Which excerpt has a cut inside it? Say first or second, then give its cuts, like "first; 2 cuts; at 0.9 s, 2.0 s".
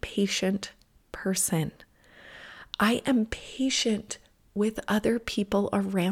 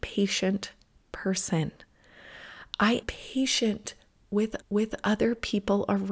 second; 2 cuts; at 3.0 s, 4.6 s